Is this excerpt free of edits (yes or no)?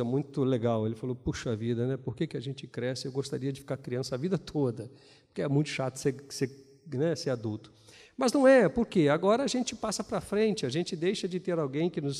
yes